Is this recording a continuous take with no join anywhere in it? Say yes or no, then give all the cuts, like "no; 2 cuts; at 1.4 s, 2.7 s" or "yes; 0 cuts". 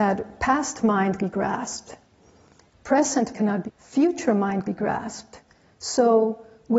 no; 4 cuts; at 1.2 s, 3.3 s, 3.6 s, 4.6 s